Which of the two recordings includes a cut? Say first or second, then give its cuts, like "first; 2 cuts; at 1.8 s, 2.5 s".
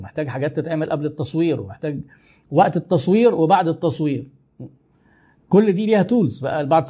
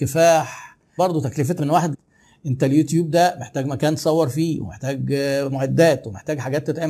second; 3 cuts; at 1.0 s, 1.6 s, 1.9 s